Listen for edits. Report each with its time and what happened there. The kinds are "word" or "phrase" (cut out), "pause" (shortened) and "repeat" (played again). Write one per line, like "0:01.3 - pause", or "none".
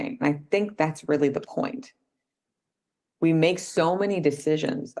none